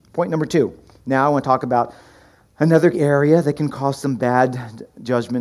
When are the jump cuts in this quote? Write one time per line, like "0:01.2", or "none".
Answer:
0:02.9